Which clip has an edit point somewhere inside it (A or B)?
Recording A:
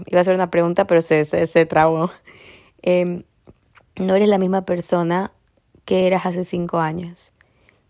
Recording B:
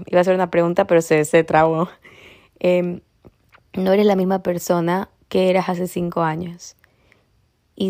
B